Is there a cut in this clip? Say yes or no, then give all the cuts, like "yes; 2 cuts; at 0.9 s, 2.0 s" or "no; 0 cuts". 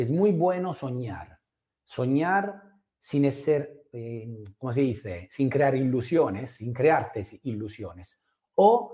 no; 0 cuts